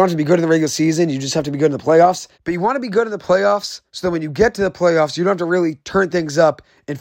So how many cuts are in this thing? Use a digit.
3